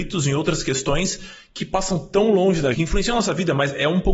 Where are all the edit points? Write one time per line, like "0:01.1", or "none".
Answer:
0:02.7